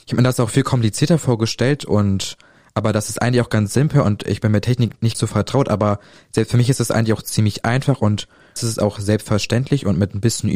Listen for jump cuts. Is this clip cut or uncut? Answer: cut